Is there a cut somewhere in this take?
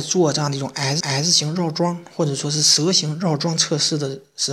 yes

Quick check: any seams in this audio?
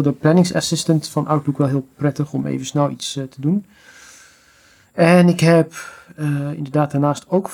no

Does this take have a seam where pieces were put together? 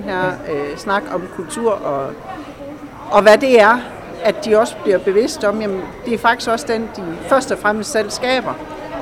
no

